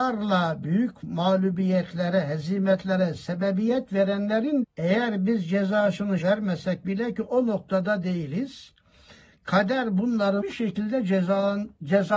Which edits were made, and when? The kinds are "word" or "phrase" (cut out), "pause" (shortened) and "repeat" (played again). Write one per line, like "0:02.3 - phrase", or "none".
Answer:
0:04.6 - word
0:06.2 - word
0:10.4 - word